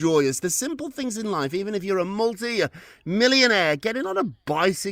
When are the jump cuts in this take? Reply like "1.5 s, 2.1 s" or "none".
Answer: none